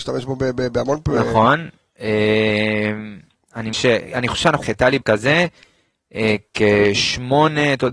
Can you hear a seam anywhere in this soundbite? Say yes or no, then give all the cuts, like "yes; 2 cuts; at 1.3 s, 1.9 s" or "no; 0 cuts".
yes; 3 cuts; at 3.7 s, 4.6 s, 5.0 s